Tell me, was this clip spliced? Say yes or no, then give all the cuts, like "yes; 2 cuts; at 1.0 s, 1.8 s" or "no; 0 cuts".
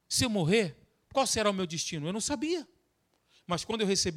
no; 0 cuts